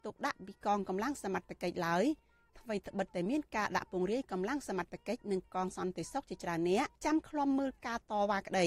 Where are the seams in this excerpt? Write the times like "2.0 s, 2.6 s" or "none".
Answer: 6.9 s